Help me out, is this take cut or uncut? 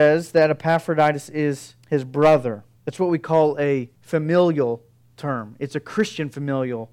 cut